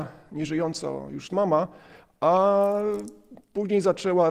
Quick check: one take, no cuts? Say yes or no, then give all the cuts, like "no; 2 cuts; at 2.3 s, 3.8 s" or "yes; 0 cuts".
no; 1 cut; at 1.3 s